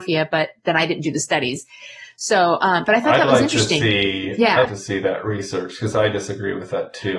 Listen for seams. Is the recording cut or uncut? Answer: cut